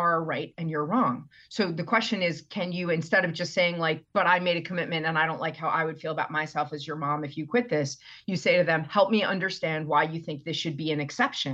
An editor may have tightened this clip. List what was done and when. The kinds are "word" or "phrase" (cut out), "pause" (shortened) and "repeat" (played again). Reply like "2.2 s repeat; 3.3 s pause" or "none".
none